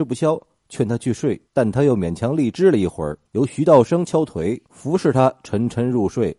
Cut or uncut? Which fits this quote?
cut